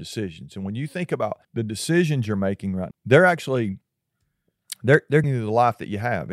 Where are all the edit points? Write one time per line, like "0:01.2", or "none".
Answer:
0:01.4
0:02.9
0:05.2